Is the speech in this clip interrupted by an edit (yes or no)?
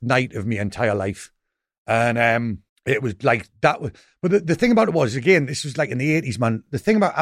yes